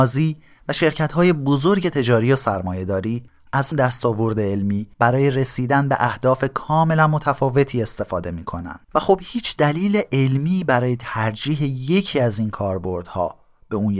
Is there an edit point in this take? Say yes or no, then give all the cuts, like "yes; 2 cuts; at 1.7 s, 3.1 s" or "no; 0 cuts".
yes; 3 cuts; at 3.7 s, 4.9 s, 8.8 s